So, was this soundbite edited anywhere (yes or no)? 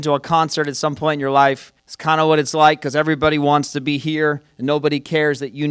yes